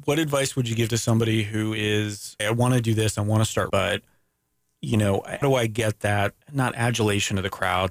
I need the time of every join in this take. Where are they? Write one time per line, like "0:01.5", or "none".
0:02.4
0:03.7
0:05.4
0:06.4